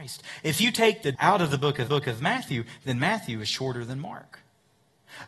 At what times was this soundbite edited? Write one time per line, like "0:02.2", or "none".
0:01.1
0:01.9